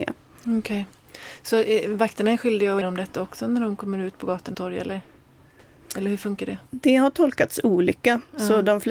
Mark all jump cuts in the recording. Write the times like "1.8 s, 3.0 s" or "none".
2.8 s, 4.5 s, 6.7 s